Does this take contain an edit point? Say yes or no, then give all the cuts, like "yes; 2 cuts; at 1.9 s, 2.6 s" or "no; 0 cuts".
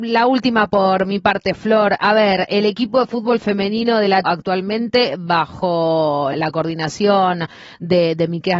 yes; 2 cuts; at 4.2 s, 6.3 s